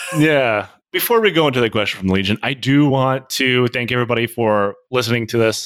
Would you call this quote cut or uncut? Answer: uncut